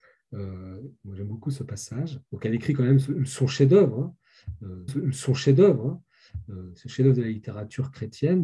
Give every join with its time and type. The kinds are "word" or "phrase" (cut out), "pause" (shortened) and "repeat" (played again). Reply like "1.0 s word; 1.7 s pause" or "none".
2.3 s pause; 4.9 s repeat

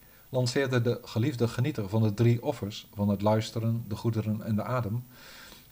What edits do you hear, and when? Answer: none

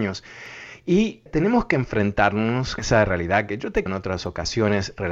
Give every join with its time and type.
1.3 s word; 2.8 s word; 3.9 s word

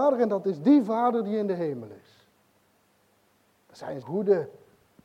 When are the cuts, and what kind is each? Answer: 4.0 s word

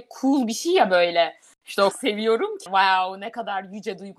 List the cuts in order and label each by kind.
1.9 s word; 2.7 s word

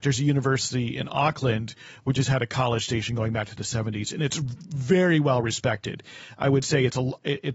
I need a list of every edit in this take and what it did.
none

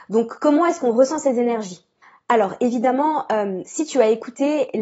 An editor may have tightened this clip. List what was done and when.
2.0 s pause

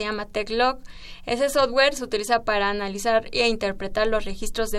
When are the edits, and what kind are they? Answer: none

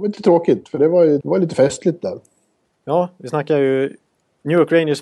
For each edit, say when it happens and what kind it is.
1.2 s word

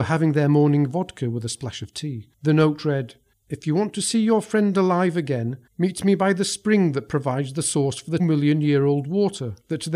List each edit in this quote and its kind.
2.3 s pause; 3.3 s pause; 5.7 s pause; 8.2 s word

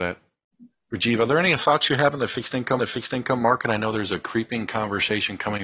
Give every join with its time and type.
2.8 s repeat

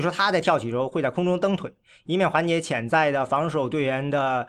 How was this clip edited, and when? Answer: none

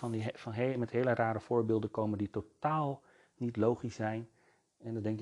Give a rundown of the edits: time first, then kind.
none

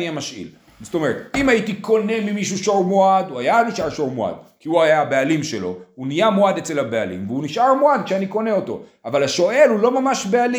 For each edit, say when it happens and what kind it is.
none

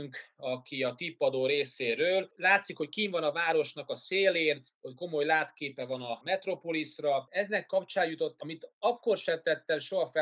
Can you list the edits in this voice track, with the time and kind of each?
8.4 s word

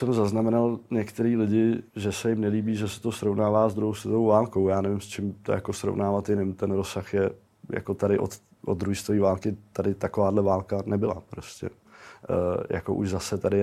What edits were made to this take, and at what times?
1.9 s pause

